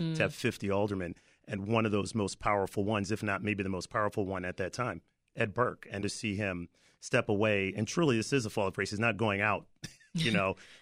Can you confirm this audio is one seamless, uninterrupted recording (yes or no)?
no